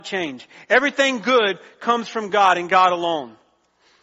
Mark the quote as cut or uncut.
uncut